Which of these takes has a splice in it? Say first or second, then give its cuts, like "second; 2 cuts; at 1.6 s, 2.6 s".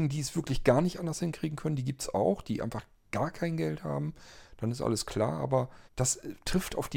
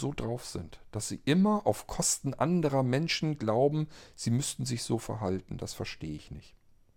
first; 1 cut; at 5.9 s